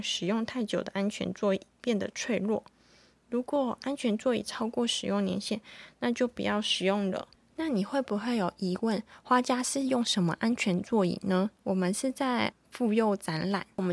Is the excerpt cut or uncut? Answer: cut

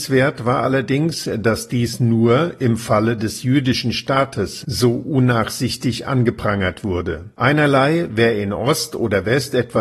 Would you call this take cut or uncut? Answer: cut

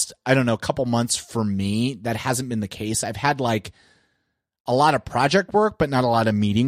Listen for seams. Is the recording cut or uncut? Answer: uncut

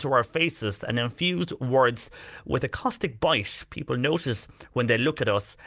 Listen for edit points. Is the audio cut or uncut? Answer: uncut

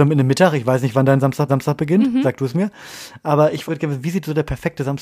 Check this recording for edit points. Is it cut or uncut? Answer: cut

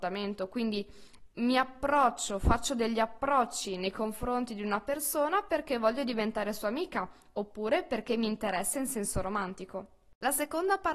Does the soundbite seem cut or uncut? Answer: uncut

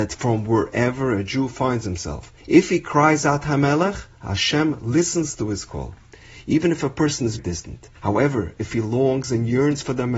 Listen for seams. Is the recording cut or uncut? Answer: cut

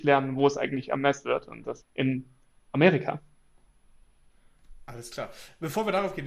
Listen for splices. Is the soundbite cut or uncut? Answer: cut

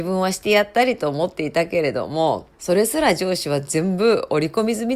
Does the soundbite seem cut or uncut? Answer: cut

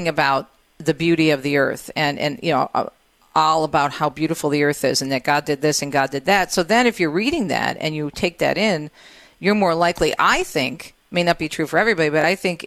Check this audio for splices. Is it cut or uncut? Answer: uncut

